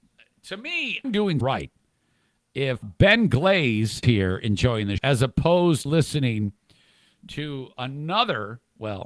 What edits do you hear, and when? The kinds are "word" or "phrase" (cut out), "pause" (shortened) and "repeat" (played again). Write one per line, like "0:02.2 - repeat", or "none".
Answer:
0:01.0 - word
0:01.4 - word
0:02.8 - word
0:04.0 - word
0:05.0 - word
0:05.9 - word

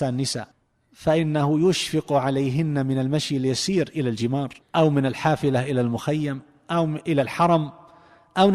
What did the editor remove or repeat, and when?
0:04.6 - pause

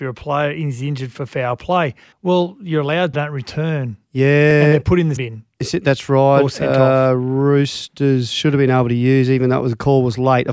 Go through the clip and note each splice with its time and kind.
0:02.1 - pause
0:03.1 - phrase
0:05.2 - word

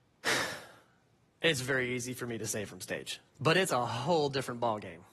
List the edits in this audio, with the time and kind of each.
0:03.3 - pause

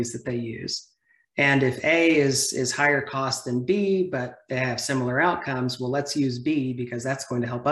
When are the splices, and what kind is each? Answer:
none

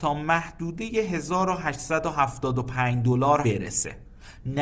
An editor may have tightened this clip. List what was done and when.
0:03.4 - word

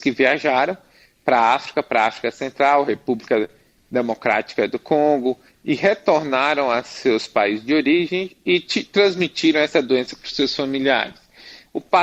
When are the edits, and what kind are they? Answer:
none

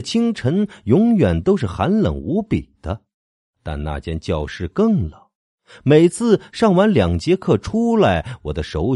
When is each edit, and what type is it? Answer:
none

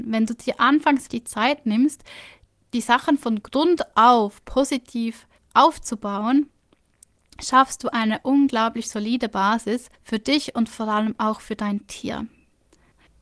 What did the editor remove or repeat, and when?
0:01.1 - word
0:02.5 - pause
0:05.4 - pause
0:10.0 - pause

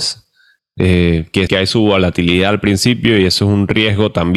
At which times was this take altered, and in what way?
0:01.5 - word

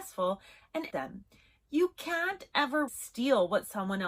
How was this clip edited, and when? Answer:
0:00.9 - word
0:02.9 - word

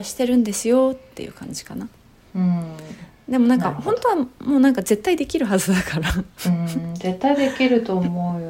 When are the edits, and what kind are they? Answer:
none

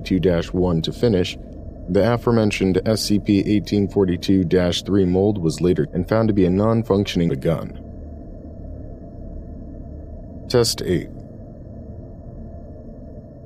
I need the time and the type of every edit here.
0:05.9 - word
0:07.3 - phrase

